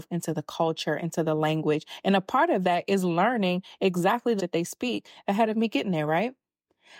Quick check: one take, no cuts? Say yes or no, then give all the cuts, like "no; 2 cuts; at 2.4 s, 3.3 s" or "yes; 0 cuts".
no; 1 cut; at 4.4 s